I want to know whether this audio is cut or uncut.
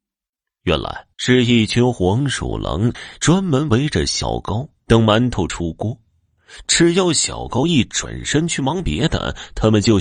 cut